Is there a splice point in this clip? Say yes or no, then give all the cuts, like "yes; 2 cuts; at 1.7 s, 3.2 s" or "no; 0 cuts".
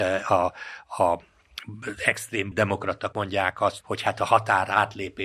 yes; 3 cuts; at 2.5 s, 3.1 s, 3.8 s